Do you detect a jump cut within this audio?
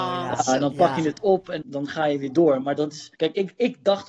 yes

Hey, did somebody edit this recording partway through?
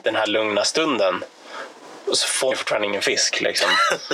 yes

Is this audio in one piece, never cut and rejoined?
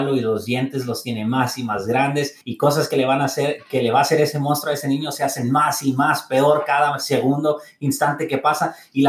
no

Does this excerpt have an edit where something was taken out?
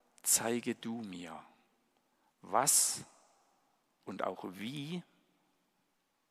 no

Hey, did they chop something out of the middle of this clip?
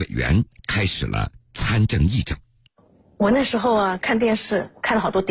no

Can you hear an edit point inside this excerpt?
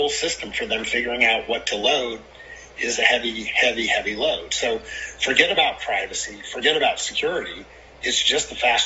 no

